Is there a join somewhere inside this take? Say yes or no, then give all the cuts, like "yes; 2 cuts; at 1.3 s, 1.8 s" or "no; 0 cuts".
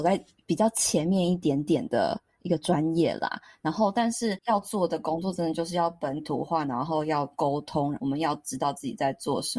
no; 0 cuts